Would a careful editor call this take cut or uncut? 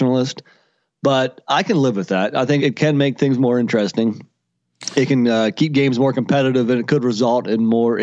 cut